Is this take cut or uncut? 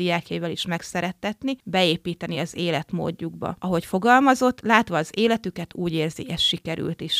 uncut